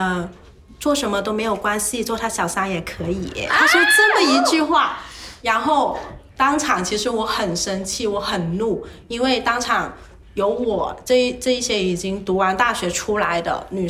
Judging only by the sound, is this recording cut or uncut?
cut